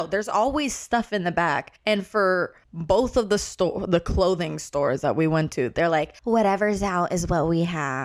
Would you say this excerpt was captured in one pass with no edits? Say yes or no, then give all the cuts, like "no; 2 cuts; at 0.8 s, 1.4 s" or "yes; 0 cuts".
no; 3 cuts; at 1.8 s, 2.6 s, 6.2 s